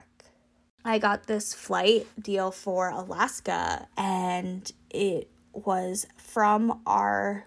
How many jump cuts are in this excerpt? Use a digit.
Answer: 2